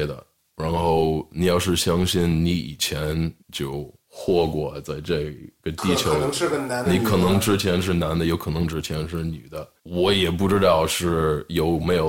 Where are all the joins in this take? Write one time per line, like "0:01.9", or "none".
0:03.4
0:06.8
0:09.8